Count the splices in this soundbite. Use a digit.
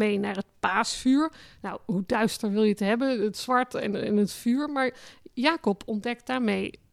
0